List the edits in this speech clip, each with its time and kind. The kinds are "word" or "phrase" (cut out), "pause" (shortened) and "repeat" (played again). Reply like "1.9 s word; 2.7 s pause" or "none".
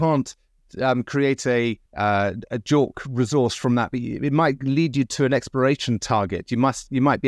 1.9 s pause